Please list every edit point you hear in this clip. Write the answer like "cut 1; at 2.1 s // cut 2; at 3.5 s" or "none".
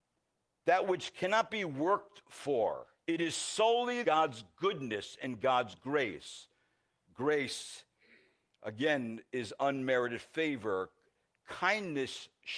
cut 1; at 3.0 s // cut 2; at 4.0 s